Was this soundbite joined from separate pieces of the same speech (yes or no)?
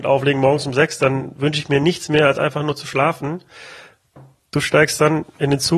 no